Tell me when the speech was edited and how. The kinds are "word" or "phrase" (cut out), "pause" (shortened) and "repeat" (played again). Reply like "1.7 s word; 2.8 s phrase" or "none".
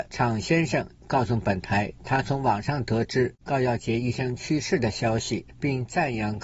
3.4 s pause